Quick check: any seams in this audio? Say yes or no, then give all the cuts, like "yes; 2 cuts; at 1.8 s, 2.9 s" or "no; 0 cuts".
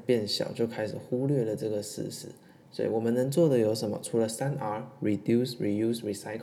no; 0 cuts